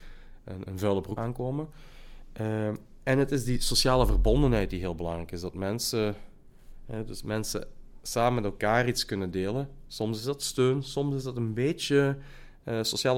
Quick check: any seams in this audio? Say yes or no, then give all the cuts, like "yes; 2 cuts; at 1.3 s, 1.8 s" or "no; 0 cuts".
yes; 1 cut; at 1.2 s